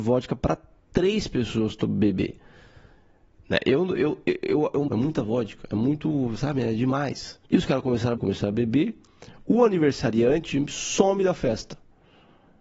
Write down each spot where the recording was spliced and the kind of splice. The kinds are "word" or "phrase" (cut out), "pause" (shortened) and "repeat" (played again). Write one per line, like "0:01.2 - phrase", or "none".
0:04.9 - phrase
0:07.4 - pause
0:08.2 - phrase